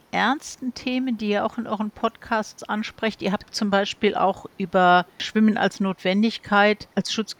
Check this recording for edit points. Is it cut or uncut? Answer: uncut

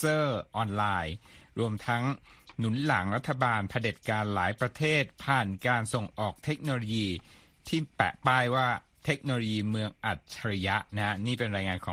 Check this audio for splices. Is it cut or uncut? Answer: uncut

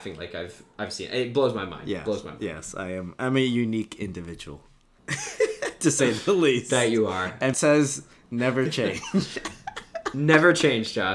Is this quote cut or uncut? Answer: cut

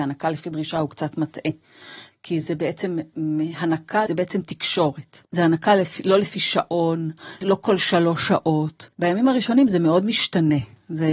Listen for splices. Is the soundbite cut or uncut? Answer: cut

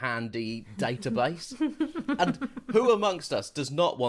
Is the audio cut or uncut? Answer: uncut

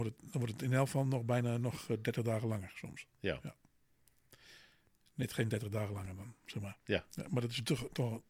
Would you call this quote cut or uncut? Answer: uncut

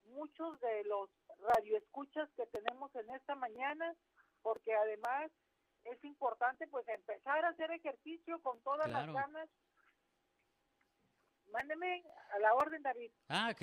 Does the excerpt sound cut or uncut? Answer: uncut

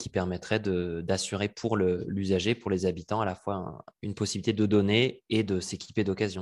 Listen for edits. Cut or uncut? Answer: uncut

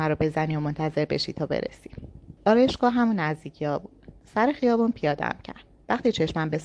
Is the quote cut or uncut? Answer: cut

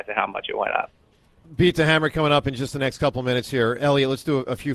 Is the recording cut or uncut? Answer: uncut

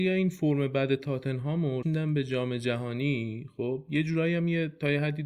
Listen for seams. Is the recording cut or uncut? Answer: cut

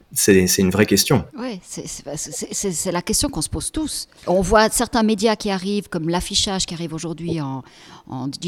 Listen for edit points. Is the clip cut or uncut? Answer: cut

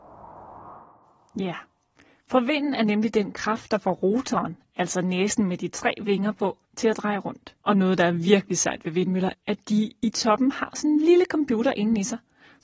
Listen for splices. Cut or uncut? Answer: cut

